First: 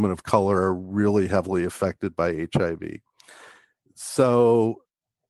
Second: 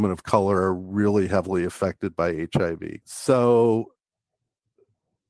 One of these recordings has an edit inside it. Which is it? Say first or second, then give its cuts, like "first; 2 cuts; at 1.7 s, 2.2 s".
second; 1 cut; at 3.0 s